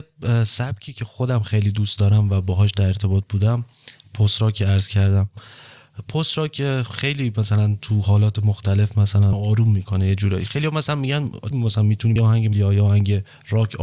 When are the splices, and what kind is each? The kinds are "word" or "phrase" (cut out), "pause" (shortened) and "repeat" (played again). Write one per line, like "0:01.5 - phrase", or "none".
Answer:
0:09.3 - word
0:11.5 - word
0:12.2 - word
0:12.5 - word